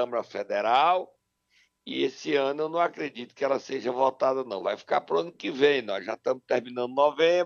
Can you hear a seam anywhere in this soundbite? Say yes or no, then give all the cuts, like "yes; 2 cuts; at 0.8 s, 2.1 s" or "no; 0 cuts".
no; 0 cuts